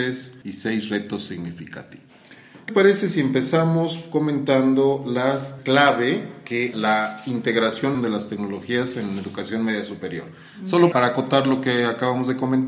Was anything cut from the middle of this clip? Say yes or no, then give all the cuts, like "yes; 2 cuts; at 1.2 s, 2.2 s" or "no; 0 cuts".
yes; 5 cuts; at 2.7 s, 5.6 s, 6.7 s, 7.9 s, 10.9 s